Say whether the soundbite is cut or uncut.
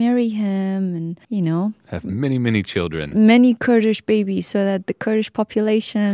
cut